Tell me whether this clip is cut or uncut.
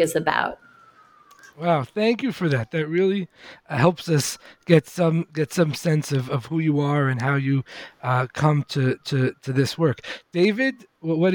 cut